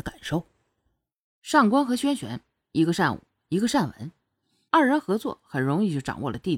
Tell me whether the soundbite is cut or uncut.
uncut